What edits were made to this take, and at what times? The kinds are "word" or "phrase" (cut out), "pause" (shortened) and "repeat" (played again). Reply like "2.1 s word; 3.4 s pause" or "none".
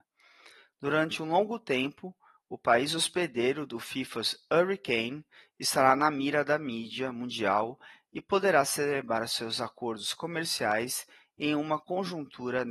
none